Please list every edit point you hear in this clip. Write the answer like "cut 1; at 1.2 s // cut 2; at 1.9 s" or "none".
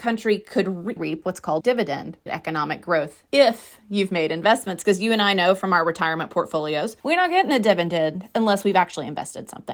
cut 1; at 1.0 s // cut 2; at 1.6 s // cut 3; at 2.3 s // cut 4; at 3.3 s // cut 5; at 7.0 s